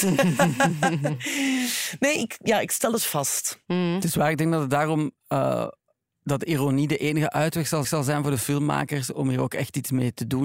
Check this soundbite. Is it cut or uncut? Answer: cut